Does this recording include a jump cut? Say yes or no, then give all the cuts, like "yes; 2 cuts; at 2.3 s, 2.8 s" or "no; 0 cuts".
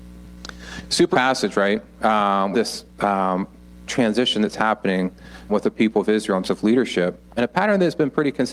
yes; 6 cuts; at 1.1 s, 2.5 s, 3.9 s, 5.5 s, 6.4 s, 7.3 s